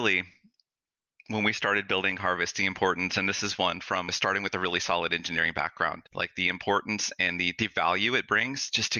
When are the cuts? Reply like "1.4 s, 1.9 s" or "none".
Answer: 6.1 s